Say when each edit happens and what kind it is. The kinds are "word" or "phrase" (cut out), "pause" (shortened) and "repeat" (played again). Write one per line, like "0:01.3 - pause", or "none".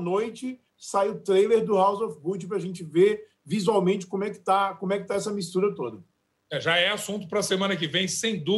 none